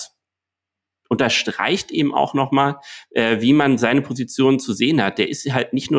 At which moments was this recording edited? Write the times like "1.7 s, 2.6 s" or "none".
none